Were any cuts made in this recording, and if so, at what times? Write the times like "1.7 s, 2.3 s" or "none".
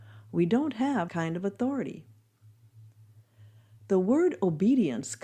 1.1 s